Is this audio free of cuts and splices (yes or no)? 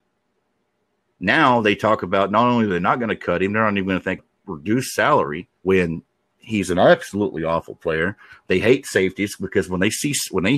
no